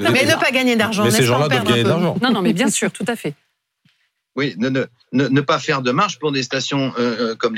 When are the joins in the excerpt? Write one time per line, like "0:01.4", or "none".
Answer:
none